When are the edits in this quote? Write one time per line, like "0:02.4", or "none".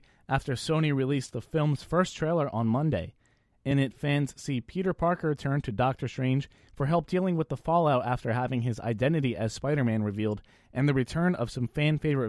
none